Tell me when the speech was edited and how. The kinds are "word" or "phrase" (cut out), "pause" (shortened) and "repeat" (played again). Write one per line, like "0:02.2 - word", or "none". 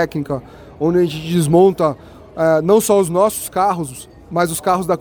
none